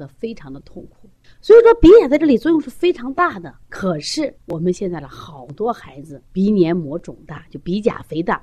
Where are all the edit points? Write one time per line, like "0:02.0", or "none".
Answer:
0:01.2
0:03.6
0:04.4
0:06.3

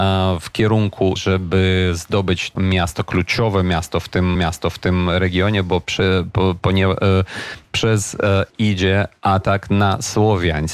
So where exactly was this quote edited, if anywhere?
0:01.2
0:02.6
0:04.4
0:07.6
0:08.5

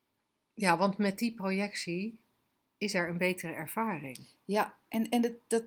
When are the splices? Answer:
none

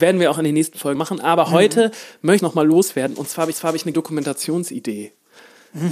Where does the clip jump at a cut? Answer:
0:00.9
0:02.4
0:03.5
0:03.9

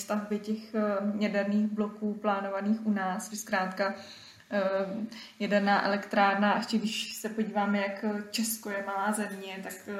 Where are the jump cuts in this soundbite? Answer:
0:03.3

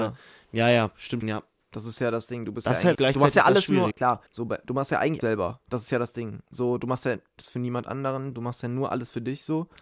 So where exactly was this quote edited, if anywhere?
0:01.2
0:01.6
0:02.9
0:03.9
0:04.3
0:05.2

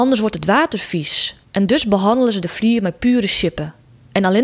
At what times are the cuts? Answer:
0:01.4

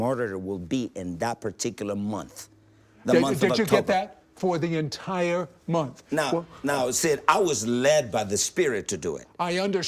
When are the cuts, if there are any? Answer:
none

